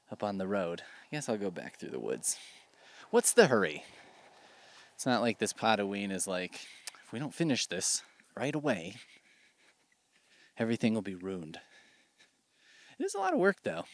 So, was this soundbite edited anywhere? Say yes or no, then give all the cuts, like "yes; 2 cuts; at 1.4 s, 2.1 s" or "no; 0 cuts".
yes; 1 cut; at 8.2 s